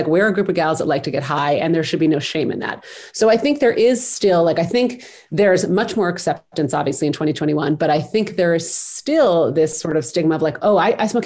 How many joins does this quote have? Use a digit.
0